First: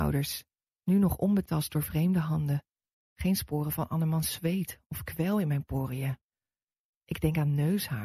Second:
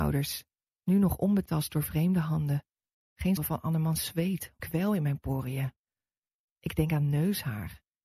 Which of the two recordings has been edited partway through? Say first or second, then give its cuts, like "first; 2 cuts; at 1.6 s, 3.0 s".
second; 2 cuts; at 3.4 s, 4.6 s